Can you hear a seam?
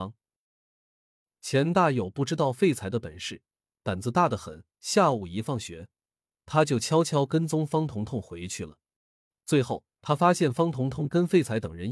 yes; 3 cuts; at 3.7 s, 9.0 s, 10.0 s

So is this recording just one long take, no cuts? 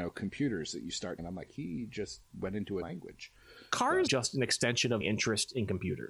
no; 4 cuts; at 1.2 s, 2.8 s, 4.1 s, 5.0 s

